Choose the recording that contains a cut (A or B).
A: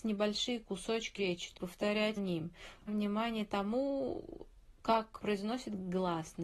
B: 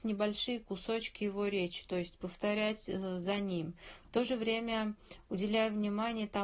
A